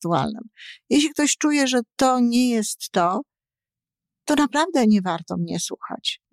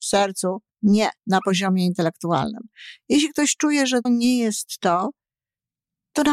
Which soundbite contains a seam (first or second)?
second